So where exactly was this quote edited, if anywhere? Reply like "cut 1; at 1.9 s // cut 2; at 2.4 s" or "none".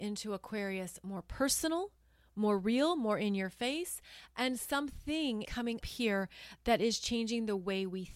cut 1; at 5.4 s // cut 2; at 5.8 s